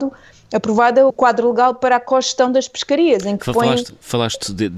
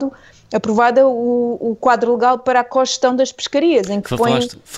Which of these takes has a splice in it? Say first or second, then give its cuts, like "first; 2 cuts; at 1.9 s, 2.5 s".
first; 1 cut; at 1.1 s